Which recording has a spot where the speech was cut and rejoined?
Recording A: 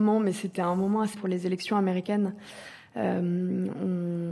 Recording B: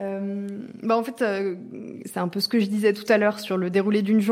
A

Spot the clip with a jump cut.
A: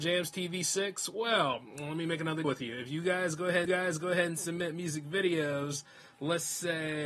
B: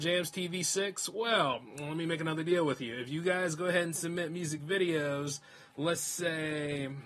A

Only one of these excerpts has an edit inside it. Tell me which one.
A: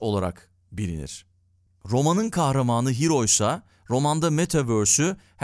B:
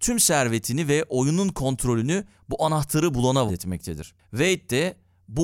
B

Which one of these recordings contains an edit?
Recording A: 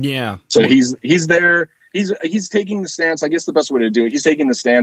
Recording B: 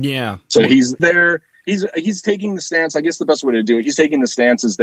B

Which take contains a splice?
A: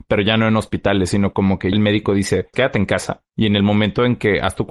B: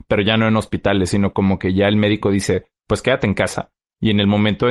A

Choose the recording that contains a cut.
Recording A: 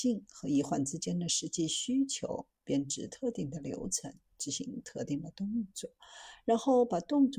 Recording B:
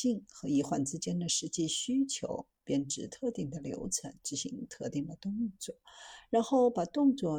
B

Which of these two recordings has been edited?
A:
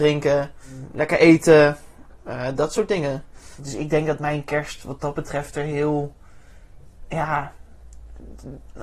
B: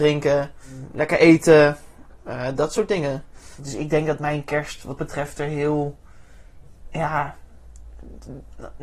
B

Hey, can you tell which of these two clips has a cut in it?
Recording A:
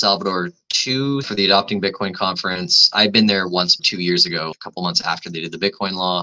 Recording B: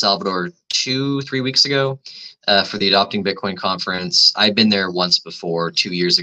A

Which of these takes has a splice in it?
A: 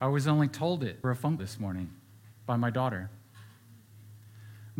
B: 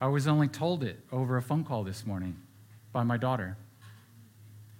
A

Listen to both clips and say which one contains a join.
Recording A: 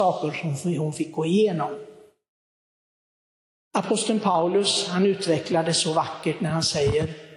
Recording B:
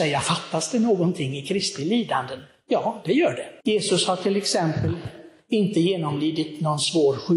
B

